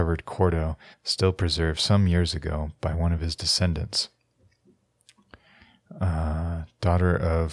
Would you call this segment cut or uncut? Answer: cut